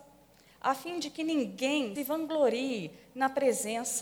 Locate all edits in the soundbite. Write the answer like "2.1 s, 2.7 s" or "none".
2.0 s